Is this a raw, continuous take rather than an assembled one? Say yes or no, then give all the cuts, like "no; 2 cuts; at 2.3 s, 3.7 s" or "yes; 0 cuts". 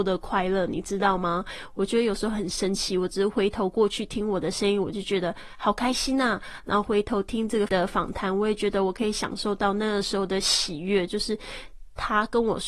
no; 1 cut; at 7.7 s